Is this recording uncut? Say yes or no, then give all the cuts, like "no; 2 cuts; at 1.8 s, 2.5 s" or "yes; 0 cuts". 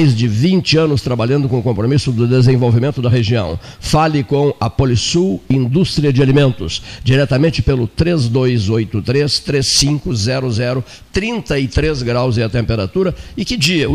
yes; 0 cuts